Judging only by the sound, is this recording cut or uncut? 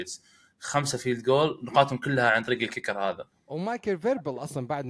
uncut